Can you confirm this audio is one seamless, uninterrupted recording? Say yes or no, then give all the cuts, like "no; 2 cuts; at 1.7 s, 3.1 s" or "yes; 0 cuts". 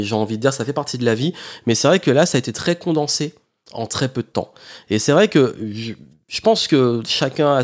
yes; 0 cuts